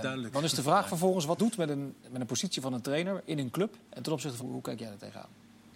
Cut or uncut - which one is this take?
cut